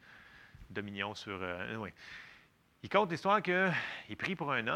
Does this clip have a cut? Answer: no; 0 cuts

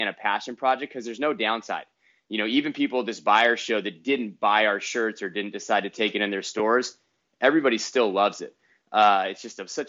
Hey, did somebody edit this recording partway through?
no; 0 cuts

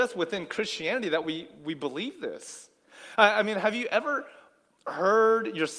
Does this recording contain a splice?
no; 0 cuts

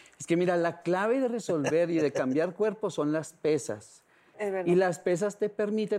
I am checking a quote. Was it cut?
no; 0 cuts

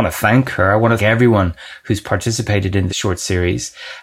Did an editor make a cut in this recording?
yes; 2 cuts; at 1.0 s, 2.9 s

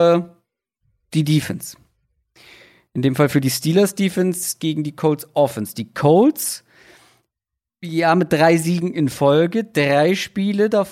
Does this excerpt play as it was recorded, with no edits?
yes; 0 cuts

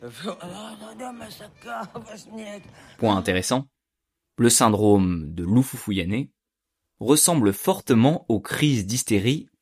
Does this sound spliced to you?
no; 0 cuts

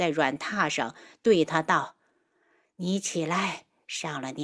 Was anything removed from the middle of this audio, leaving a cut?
no; 0 cuts

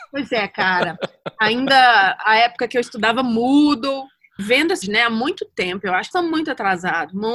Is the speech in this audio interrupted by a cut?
yes; 3 cuts; at 4.4 s, 4.8 s, 6.1 s

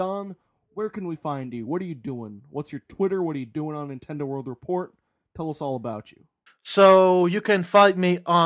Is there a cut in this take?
yes; 1 cut; at 6.5 s

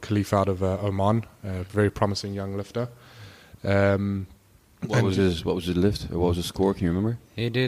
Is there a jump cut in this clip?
no; 0 cuts

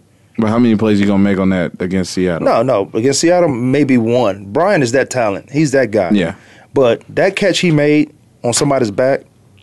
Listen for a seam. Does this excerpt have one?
no; 0 cuts

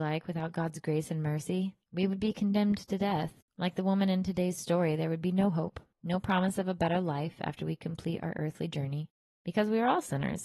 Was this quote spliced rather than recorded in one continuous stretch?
yes; 4 cuts; at 1.8 s, 3.5 s, 5.9 s, 9.3 s

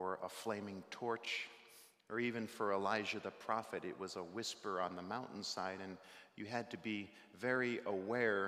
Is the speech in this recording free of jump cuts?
yes; 0 cuts

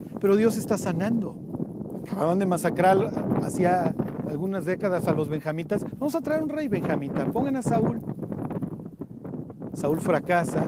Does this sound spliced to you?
no; 0 cuts

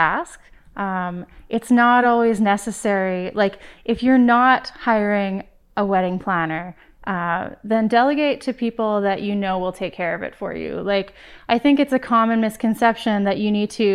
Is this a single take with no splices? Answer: yes; 0 cuts

